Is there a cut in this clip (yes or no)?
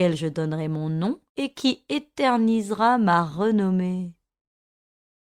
yes